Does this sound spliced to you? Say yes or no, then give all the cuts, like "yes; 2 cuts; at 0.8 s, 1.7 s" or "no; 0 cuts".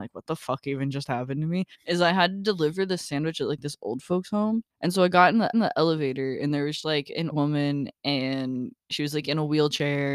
yes; 5 cuts; at 1.7 s, 4.7 s, 5.5 s, 6.8 s, 7.3 s